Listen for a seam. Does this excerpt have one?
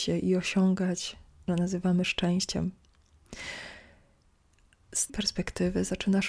yes; 2 cuts; at 1.5 s, 5.1 s

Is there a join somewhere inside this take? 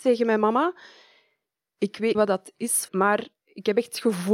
yes; 2 cuts; at 2.1 s, 2.9 s

